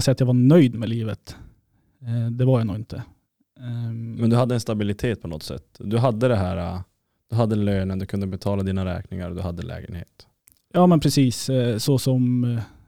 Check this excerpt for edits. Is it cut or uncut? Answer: uncut